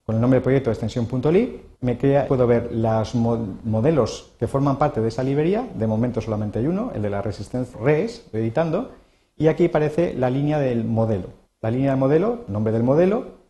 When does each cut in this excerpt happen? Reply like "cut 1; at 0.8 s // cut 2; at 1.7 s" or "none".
cut 1; at 1.7 s // cut 2; at 2.3 s // cut 3; at 7.7 s // cut 4; at 8.3 s // cut 5; at 11.4 s // cut 6; at 12.5 s